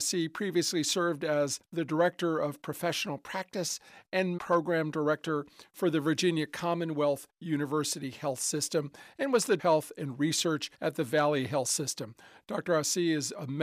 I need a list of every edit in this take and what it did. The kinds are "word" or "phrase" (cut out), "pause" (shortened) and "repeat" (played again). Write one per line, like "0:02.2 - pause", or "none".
0:04.4 - word
0:09.6 - phrase
0:10.7 - pause